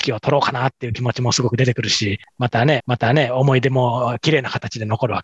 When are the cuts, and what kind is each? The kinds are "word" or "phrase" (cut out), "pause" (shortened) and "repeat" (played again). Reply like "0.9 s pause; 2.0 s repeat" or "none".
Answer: 2.8 s repeat